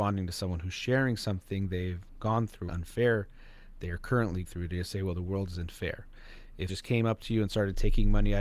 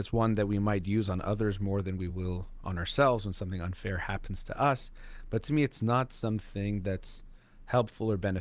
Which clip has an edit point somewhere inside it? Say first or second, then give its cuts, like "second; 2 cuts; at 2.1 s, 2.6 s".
first; 3 cuts; at 2.7 s, 4.4 s, 6.7 s